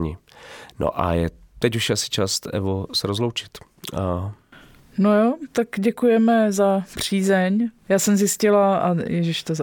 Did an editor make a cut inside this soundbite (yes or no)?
no